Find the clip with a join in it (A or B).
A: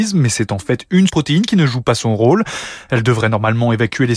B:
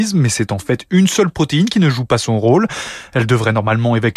A